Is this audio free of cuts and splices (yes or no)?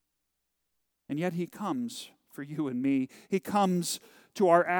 yes